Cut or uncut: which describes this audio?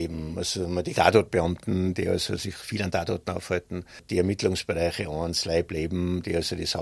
cut